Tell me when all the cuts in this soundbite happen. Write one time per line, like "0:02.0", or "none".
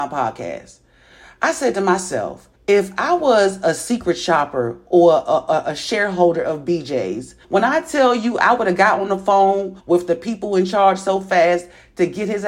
0:02.5
0:07.4
0:09.8